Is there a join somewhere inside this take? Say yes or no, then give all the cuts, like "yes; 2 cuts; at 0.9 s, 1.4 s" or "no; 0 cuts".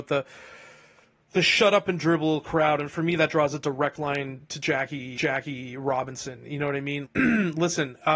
yes; 2 cuts; at 5.2 s, 7.1 s